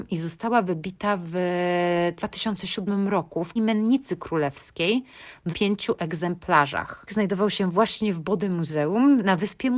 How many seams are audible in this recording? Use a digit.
3